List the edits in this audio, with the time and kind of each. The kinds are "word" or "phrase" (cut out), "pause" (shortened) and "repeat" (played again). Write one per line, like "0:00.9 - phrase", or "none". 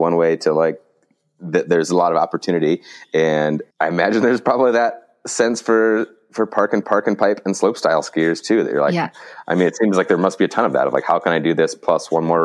0:03.7 - pause
0:06.8 - repeat